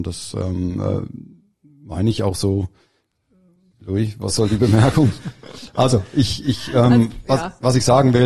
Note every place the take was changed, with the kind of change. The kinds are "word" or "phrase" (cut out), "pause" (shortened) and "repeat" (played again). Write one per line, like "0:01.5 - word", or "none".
none